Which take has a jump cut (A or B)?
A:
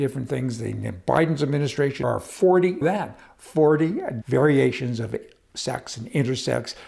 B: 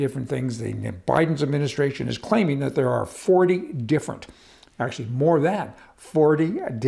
A